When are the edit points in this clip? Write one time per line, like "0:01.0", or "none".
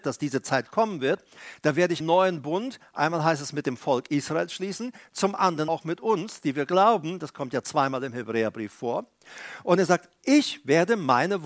0:02.0
0:05.7